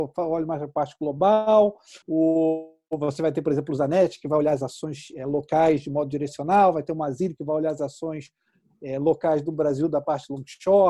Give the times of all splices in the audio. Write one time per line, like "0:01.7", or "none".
0:02.0